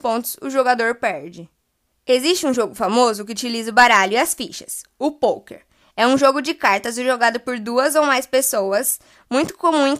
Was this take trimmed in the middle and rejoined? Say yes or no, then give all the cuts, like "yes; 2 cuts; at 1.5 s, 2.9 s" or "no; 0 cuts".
yes; 1 cut; at 1.9 s